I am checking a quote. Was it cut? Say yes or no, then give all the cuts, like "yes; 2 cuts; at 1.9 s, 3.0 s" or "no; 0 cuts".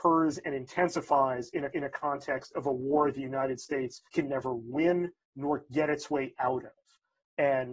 yes; 2 cuts; at 1.7 s, 4.1 s